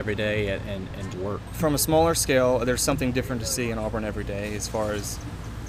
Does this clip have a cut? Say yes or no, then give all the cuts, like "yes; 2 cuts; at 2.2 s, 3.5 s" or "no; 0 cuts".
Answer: yes; 1 cut; at 1.1 s